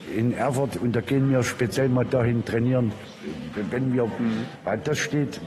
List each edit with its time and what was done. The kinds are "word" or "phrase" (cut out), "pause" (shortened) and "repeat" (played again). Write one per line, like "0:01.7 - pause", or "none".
0:04.1 - word